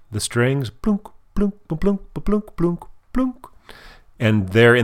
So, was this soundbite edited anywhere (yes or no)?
no